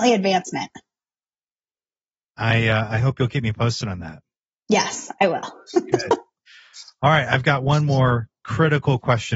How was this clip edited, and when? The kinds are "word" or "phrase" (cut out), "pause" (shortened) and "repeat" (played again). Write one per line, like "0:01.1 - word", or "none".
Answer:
none